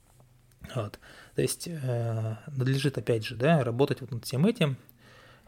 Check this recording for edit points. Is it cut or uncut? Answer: uncut